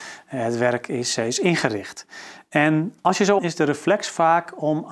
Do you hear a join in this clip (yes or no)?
yes